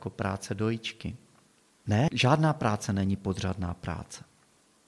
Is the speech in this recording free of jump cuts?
yes; 0 cuts

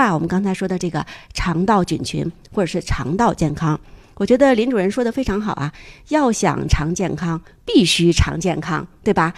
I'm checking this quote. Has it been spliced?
no; 0 cuts

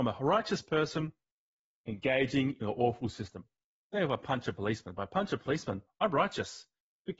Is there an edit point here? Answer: no; 0 cuts

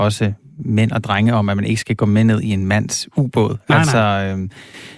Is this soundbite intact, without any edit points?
yes; 0 cuts

